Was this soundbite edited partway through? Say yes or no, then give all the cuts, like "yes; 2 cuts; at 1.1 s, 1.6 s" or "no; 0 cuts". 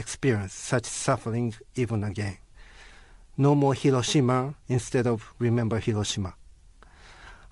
yes; 1 cut; at 4.6 s